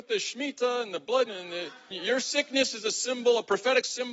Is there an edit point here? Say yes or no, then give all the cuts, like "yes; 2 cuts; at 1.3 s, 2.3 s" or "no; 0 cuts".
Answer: yes; 2 cuts; at 1.3 s, 1.9 s